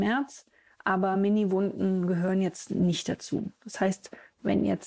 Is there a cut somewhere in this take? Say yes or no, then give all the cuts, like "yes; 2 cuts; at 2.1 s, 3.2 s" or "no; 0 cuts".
no; 0 cuts